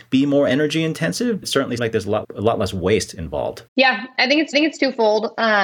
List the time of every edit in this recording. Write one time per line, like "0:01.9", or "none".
0:01.4
0:01.8
0:02.2
0:03.7
0:04.5